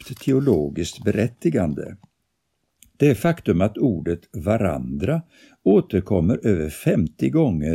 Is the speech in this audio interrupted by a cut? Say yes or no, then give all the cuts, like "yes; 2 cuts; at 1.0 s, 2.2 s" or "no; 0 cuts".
no; 0 cuts